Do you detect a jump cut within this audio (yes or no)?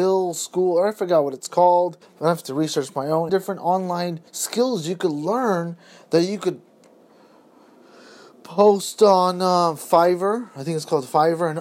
yes